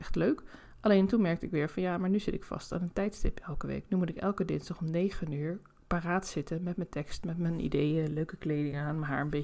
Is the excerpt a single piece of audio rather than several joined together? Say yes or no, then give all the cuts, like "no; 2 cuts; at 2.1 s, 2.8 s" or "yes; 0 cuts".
yes; 0 cuts